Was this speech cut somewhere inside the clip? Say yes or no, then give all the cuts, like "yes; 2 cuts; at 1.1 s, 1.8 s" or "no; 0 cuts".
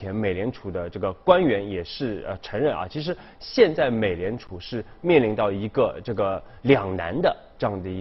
no; 0 cuts